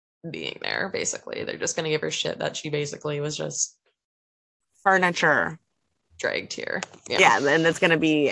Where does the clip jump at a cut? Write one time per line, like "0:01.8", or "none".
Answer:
none

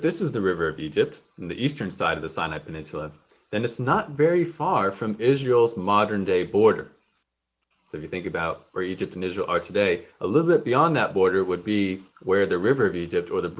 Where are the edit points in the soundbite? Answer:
0:08.7
0:12.1

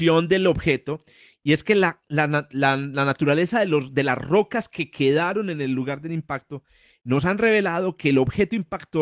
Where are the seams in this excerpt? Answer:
none

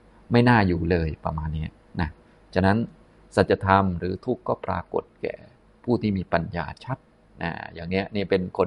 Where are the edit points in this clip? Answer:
none

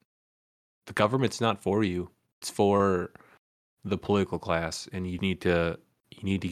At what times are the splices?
0:02.4
0:05.2

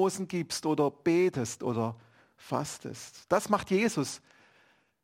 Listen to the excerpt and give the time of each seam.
none

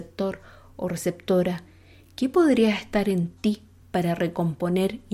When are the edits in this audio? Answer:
none

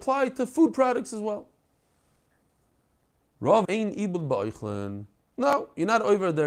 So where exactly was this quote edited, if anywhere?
0:03.6

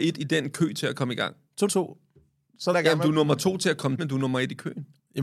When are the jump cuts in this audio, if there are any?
0:01.7
0:02.7
0:04.0

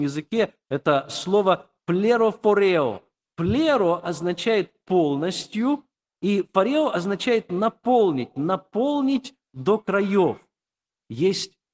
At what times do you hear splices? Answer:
none

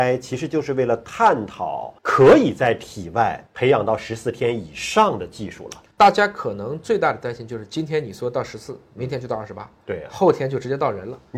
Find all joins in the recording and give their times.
0:02.0
0:03.5
0:05.9

